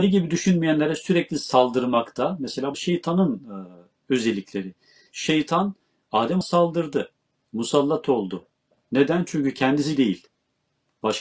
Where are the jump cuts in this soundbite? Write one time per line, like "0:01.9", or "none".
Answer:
0:02.7
0:06.4
0:10.0